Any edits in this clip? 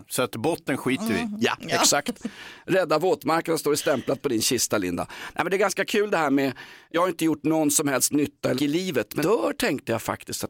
yes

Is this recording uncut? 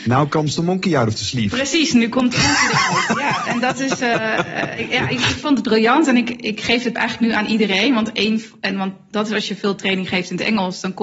no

